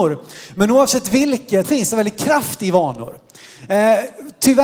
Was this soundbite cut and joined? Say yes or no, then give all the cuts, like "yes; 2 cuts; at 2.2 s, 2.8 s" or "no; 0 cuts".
yes; 1 cut; at 1.6 s